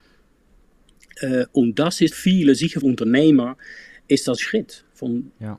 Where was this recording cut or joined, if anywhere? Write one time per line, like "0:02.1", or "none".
0:02.1
0:02.8
0:04.4